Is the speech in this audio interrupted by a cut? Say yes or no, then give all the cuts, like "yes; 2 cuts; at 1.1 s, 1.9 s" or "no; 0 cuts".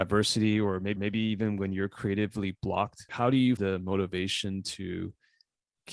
yes; 3 cuts; at 1.0 s, 3.1 s, 3.6 s